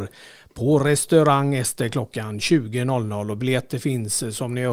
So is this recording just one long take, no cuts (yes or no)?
yes